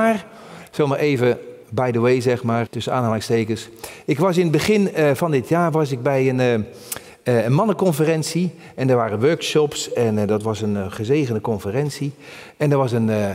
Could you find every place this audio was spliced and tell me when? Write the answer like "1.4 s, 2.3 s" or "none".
1.6 s, 2.7 s